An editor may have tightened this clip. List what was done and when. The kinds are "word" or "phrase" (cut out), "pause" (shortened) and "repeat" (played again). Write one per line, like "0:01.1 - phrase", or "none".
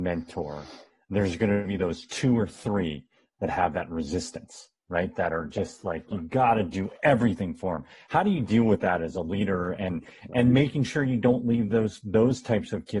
none